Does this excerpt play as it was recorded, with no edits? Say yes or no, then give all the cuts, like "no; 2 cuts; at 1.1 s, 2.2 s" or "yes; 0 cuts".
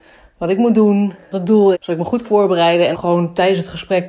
no; 4 cuts; at 1.3 s, 1.7 s, 2.2 s, 2.9 s